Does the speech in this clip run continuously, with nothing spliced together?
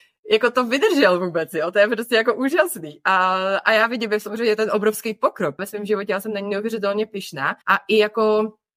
no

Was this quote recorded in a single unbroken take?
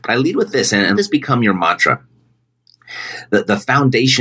no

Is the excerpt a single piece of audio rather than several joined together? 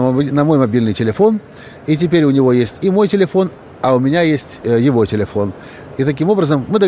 yes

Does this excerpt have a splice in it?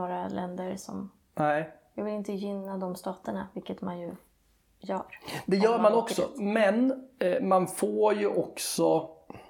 no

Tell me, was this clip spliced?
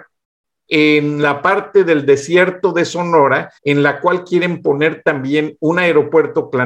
yes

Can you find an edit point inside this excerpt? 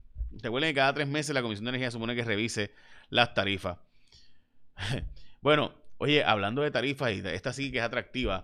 no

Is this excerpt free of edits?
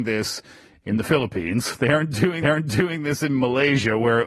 no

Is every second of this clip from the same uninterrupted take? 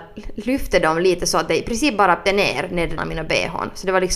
no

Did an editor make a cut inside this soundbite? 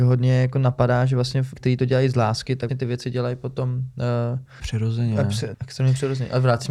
yes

